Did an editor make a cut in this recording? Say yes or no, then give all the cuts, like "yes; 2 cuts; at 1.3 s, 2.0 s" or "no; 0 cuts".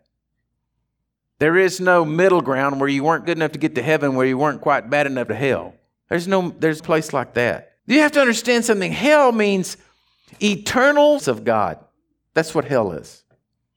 yes; 6 cuts; at 3.2 s, 5.3 s, 5.9 s, 6.8 s, 7.8 s, 11.2 s